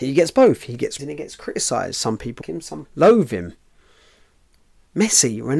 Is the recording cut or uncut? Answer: cut